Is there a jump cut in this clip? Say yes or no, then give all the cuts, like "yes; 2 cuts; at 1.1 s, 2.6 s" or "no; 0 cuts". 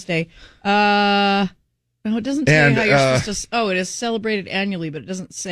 no; 0 cuts